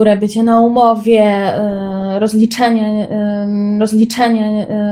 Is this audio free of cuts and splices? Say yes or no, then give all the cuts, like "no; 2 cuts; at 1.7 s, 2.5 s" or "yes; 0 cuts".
no; 1 cut; at 3.8 s